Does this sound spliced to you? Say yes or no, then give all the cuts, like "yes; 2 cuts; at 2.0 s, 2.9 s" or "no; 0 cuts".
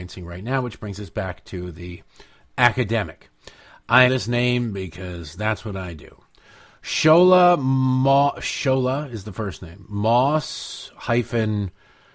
yes; 1 cut; at 4.1 s